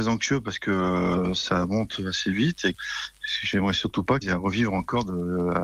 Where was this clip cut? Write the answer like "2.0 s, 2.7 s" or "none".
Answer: 2.7 s, 4.2 s